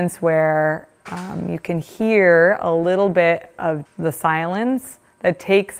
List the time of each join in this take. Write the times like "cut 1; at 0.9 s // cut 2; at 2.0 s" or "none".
cut 1; at 3.9 s